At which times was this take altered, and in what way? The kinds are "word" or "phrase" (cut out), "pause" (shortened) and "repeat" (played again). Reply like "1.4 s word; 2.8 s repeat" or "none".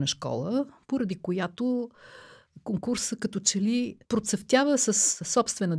4.0 s pause